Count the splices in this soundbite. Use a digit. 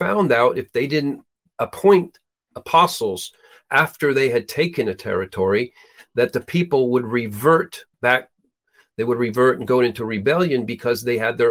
1